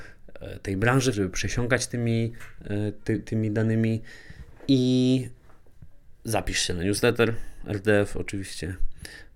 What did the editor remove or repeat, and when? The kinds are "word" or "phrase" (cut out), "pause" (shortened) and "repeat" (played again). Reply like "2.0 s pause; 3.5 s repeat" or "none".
1.1 s phrase